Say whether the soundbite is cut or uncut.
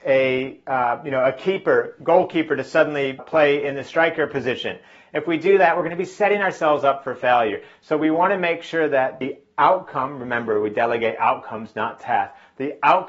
cut